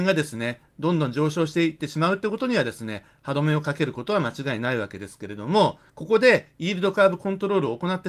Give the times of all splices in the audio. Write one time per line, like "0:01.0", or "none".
0:05.9